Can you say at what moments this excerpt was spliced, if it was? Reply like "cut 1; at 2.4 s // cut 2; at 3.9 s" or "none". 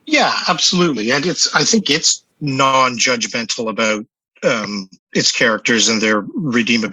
cut 1; at 2.3 s // cut 2; at 5.0 s

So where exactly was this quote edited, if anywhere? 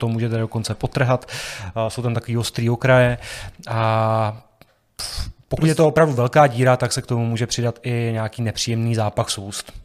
none

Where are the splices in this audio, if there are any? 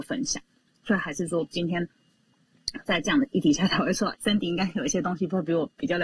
cut 1; at 4.1 s

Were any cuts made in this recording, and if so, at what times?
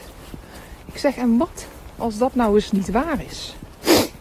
none

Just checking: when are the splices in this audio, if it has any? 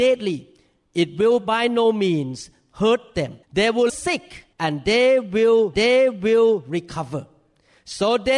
cut 1; at 3.4 s // cut 2; at 3.9 s // cut 3; at 4.5 s // cut 4; at 5.7 s

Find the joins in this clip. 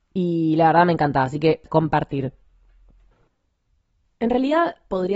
cut 1; at 1.7 s

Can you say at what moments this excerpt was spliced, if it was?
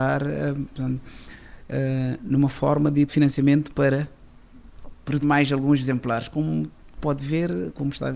cut 1; at 3.1 s // cut 2; at 5.2 s // cut 3; at 7.0 s

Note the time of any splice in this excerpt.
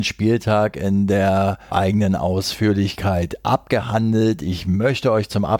cut 1; at 1.7 s

